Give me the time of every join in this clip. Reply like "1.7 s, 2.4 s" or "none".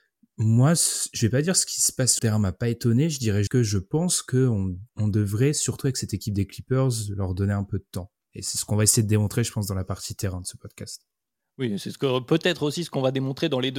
2.2 s, 3.5 s, 4.9 s